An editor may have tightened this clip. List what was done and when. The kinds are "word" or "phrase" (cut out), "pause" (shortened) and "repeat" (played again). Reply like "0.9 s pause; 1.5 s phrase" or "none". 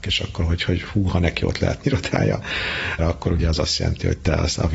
1.8 s word; 3.0 s word